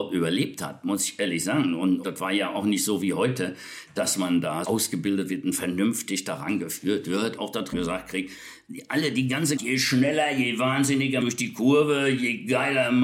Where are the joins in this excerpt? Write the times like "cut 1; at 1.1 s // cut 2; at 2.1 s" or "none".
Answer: cut 1; at 2.0 s // cut 2; at 4.6 s // cut 3; at 7.4 s // cut 4; at 7.7 s // cut 5; at 9.6 s // cut 6; at 11.2 s